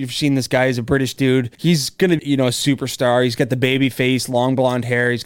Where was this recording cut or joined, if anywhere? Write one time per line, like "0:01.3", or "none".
0:01.5
0:02.2